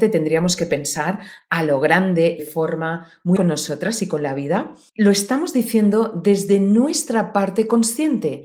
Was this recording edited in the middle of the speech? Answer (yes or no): yes